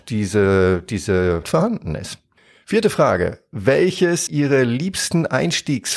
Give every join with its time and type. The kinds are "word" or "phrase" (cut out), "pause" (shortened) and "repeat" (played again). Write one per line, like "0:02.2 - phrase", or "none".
0:01.4 - word
0:02.4 - pause
0:04.3 - word